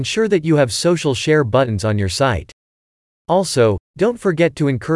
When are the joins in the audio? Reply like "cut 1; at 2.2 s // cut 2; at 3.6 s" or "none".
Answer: none